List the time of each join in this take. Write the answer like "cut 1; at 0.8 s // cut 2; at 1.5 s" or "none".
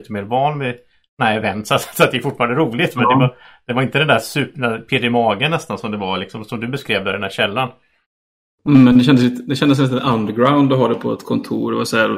none